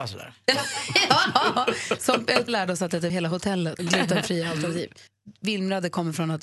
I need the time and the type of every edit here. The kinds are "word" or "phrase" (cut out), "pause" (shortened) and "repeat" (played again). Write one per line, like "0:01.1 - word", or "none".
0:02.5 - word
0:03.1 - word
0:03.8 - word
0:05.1 - pause